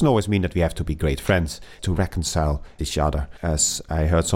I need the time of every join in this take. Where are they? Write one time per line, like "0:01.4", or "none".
0:01.8
0:02.8
0:03.4